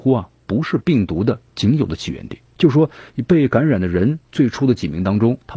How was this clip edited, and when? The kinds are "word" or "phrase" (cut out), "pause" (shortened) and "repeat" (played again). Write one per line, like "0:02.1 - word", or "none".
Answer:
0:02.5 - pause
0:04.2 - pause